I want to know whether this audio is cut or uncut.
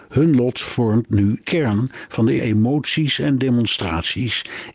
cut